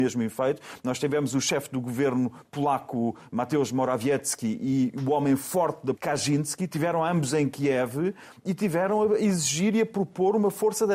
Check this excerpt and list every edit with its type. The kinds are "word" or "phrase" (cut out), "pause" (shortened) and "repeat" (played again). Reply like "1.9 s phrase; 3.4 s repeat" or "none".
5.9 s word; 6.7 s word